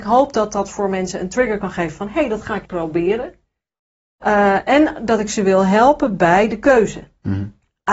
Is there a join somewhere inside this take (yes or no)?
yes